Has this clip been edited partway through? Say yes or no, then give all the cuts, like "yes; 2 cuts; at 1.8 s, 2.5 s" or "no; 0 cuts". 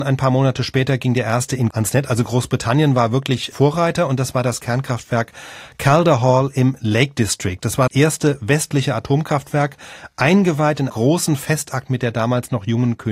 yes; 4 cuts; at 1.7 s, 3.5 s, 7.9 s, 10.9 s